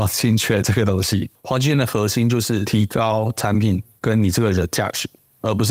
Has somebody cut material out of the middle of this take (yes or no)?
no